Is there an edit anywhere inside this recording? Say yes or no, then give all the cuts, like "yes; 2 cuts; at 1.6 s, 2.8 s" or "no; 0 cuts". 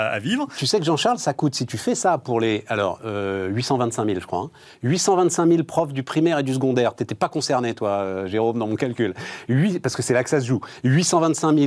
no; 0 cuts